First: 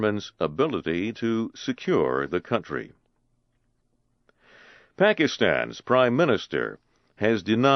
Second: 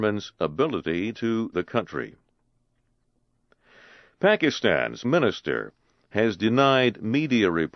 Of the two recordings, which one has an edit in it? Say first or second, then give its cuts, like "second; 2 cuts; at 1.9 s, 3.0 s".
second; 2 cuts; at 1.5 s, 5.0 s